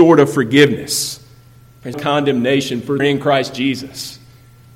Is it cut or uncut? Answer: cut